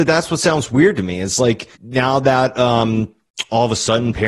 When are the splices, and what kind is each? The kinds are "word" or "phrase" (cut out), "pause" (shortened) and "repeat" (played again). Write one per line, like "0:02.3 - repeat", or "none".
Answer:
0:01.7 - pause